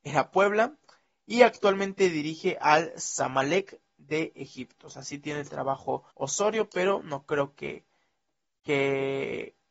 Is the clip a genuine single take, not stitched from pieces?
no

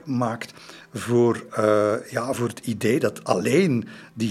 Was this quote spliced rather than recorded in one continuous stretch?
no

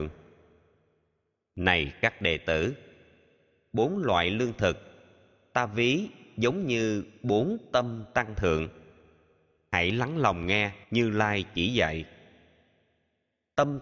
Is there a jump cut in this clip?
yes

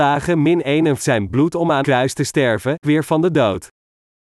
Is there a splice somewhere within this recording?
yes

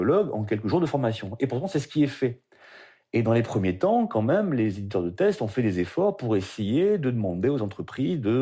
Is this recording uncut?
yes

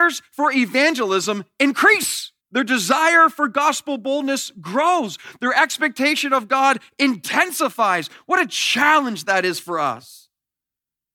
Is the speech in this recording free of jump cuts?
no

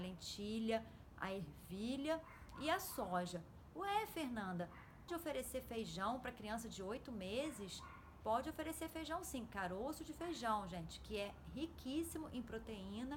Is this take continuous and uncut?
no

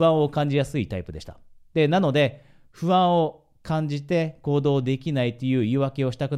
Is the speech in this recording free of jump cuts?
yes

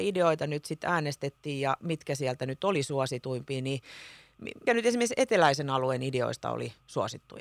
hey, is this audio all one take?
no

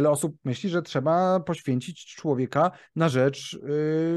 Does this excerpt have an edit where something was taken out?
no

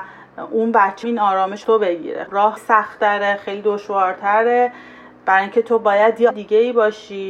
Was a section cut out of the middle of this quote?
yes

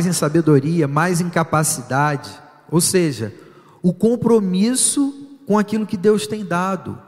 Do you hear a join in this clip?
no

